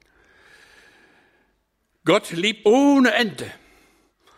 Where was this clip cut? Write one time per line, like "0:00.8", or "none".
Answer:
0:02.6